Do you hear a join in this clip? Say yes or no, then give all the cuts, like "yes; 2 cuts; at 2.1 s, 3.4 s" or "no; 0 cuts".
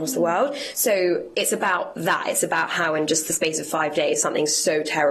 no; 0 cuts